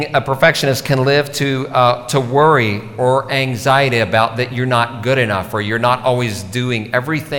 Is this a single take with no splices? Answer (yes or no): yes